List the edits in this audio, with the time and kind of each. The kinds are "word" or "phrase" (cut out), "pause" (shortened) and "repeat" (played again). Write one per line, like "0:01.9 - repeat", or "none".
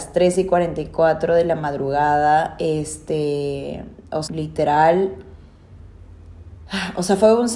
0:04.3 - word